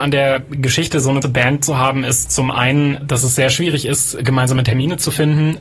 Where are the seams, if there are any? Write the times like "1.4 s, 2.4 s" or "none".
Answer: 1.2 s, 3.0 s